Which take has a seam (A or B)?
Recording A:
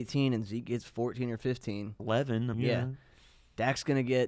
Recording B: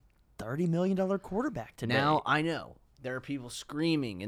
A